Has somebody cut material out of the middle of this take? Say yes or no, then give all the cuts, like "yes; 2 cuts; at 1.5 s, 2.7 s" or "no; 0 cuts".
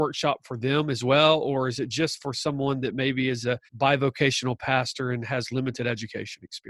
yes; 1 cut; at 3.7 s